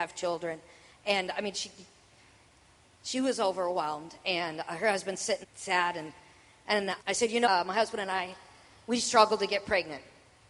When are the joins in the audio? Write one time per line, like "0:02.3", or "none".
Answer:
0:05.4
0:07.0
0:07.4